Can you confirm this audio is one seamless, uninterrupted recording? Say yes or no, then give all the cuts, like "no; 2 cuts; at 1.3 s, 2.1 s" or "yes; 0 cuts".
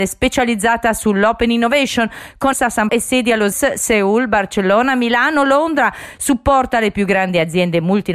no; 3 cuts; at 2.5 s, 2.9 s, 3.5 s